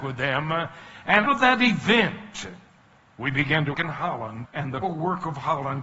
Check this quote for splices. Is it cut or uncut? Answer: cut